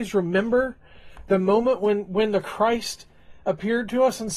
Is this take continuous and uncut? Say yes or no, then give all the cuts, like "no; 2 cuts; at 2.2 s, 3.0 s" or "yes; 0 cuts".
yes; 0 cuts